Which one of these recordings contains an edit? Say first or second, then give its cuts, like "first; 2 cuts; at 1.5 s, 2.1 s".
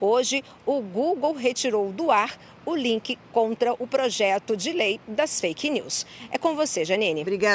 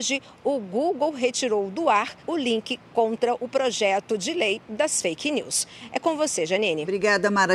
second; 1 cut; at 2.2 s